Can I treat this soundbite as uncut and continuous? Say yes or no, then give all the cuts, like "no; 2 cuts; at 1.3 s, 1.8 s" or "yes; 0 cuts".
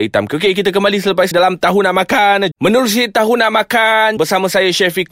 no; 3 cuts; at 1.3 s, 2.5 s, 4.2 s